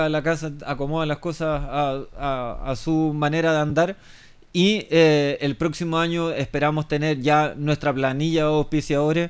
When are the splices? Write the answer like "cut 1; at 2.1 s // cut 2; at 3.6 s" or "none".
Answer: none

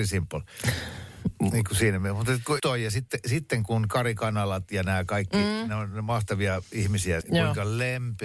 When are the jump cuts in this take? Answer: cut 1; at 2.6 s // cut 2; at 7.2 s

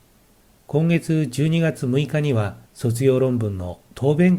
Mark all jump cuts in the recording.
cut 1; at 2.6 s

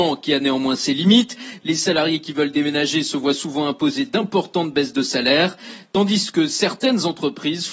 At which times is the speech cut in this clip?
none

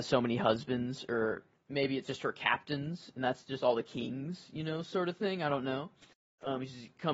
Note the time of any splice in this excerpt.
cut 1; at 2.0 s

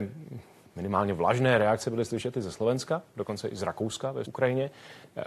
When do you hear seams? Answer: cut 1; at 4.2 s

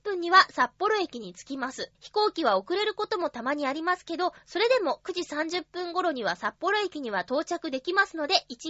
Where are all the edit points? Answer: cut 1; at 1.9 s

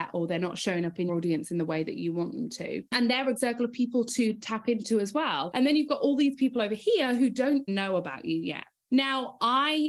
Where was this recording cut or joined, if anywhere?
cut 1; at 1.1 s // cut 2; at 3.4 s // cut 3; at 7.7 s

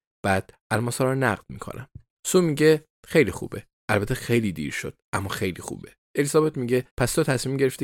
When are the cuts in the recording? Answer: cut 1; at 2.2 s // cut 2; at 6.0 s // cut 3; at 6.9 s

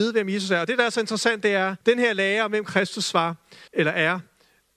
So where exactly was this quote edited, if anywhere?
cut 1; at 1.8 s // cut 2; at 3.7 s

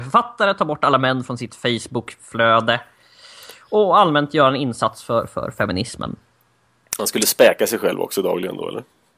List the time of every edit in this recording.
none

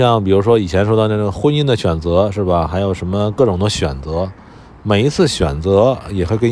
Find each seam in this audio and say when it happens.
none

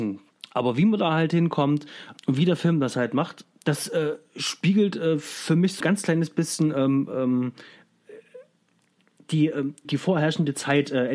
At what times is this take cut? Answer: cut 1; at 5.8 s // cut 2; at 9.8 s

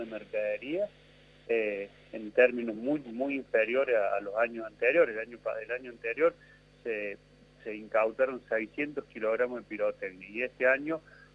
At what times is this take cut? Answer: none

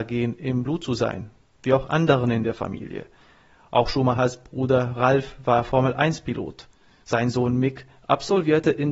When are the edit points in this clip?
none

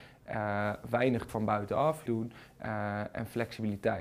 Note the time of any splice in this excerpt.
cut 1; at 1.3 s // cut 2; at 2.1 s

